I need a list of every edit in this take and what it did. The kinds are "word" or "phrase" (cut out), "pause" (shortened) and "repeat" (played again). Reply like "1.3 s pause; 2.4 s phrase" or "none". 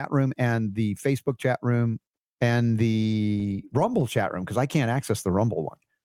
none